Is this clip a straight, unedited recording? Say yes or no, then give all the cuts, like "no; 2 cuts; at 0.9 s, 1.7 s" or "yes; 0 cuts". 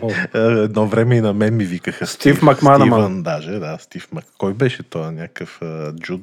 yes; 0 cuts